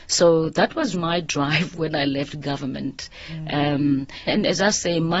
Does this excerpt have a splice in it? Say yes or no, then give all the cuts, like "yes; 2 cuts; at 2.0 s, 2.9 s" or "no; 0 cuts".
yes; 2 cuts; at 0.9 s, 4.3 s